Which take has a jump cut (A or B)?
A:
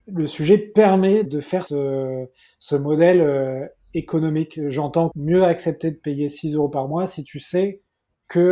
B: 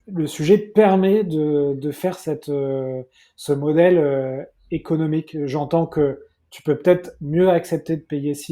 A